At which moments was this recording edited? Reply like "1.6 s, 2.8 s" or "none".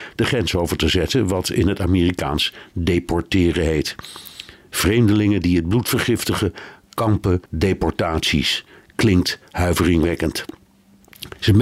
7.5 s

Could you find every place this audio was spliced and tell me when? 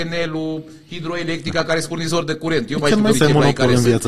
3.1 s

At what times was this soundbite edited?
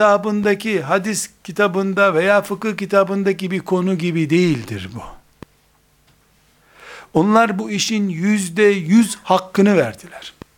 none

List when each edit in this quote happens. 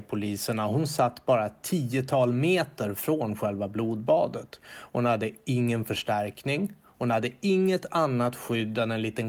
none

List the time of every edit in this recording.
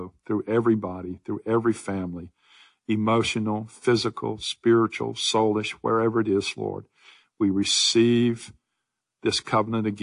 none

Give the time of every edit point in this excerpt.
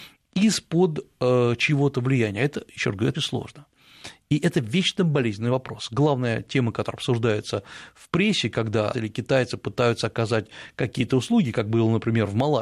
3.1 s, 8.9 s

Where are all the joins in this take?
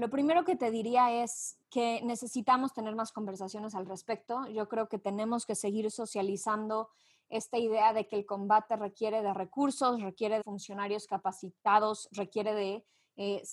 1.6 s, 10.4 s

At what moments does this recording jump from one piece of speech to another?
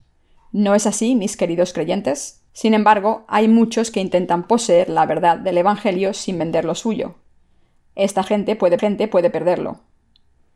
2.5 s, 8.8 s

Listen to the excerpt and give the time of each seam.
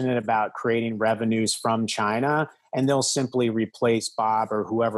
none

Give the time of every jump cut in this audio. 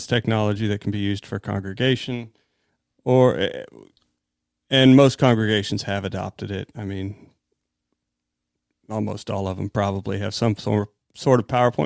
none

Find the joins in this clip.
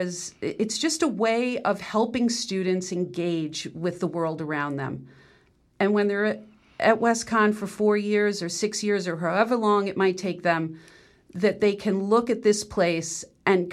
none

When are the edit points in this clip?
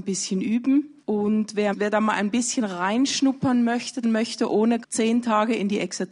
1.0 s, 1.7 s, 4.0 s, 4.8 s

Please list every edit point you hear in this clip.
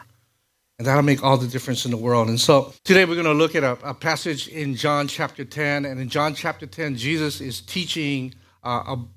2.8 s

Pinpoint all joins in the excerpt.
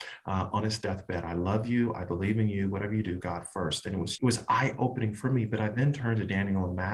3.2 s, 4.2 s

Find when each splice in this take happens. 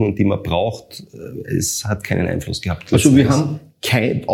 none

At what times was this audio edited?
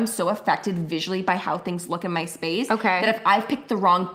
none

